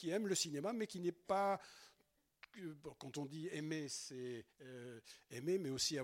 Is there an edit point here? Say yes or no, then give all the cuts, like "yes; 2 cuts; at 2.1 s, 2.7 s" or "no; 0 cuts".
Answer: yes; 1 cut; at 4.5 s